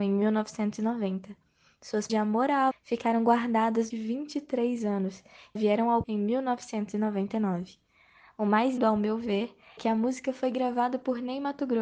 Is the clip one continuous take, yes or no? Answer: no